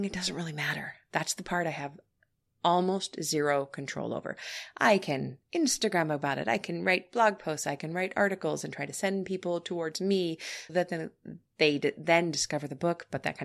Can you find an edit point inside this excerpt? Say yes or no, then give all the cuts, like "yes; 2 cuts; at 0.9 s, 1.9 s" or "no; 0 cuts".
yes; 1 cut; at 10.7 s